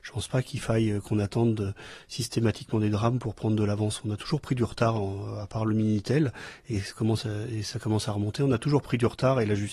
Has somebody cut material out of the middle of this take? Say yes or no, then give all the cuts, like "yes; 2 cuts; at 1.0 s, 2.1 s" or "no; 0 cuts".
no; 0 cuts